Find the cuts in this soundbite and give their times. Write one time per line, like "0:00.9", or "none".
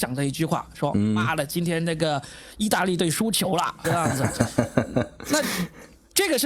0:03.8